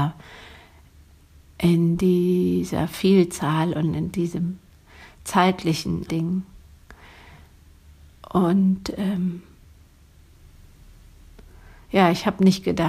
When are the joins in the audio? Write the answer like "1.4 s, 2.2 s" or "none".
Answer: 6.1 s